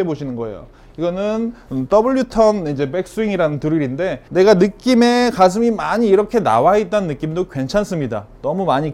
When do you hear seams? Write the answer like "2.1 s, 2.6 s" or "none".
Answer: 4.3 s

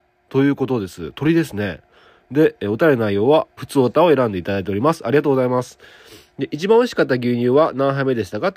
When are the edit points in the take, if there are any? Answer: 3.6 s

